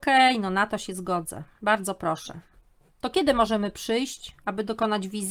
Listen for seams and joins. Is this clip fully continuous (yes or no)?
yes